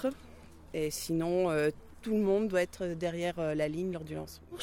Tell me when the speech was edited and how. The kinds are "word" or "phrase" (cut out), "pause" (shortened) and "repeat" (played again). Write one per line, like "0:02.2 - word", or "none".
none